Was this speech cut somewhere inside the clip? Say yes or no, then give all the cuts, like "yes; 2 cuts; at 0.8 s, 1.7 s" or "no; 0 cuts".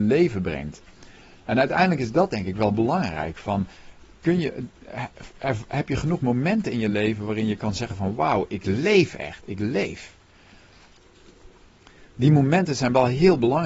no; 0 cuts